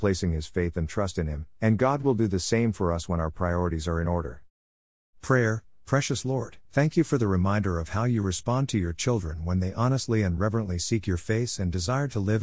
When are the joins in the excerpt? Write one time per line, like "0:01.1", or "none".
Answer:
0:06.7